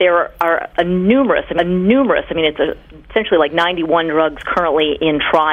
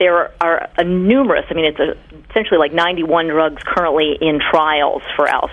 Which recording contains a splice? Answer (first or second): first